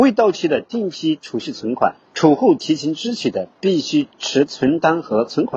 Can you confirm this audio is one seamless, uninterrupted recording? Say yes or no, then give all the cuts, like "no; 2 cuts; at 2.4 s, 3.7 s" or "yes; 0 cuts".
no; 1 cut; at 2.0 s